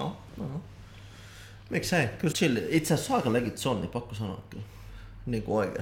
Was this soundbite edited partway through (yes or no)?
yes